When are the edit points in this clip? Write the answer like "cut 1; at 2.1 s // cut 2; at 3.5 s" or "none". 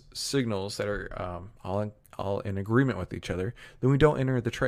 none